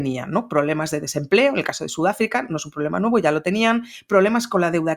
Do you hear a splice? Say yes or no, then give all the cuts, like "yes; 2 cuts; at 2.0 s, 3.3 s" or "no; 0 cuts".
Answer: no; 0 cuts